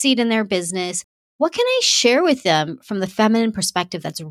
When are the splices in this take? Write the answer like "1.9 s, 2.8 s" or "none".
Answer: none